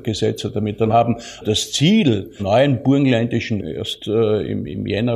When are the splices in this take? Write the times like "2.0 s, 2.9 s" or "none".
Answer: 0.9 s, 1.4 s, 2.4 s, 3.6 s